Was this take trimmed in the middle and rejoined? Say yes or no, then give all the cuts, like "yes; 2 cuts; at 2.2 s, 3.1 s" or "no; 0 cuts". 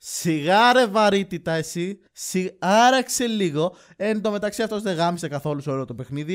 yes; 1 cut; at 2.1 s